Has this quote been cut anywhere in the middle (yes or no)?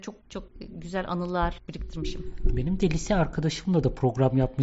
no